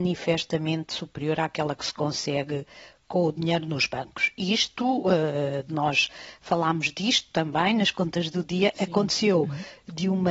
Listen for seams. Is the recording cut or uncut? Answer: uncut